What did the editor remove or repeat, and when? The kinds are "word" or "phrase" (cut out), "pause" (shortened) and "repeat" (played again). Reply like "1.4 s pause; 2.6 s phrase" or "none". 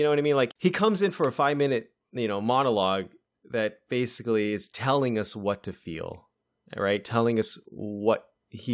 none